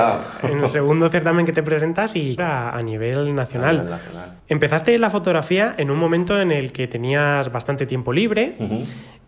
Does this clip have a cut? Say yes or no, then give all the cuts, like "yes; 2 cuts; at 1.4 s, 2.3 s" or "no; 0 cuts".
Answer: yes; 2 cuts; at 2.4 s, 4.4 s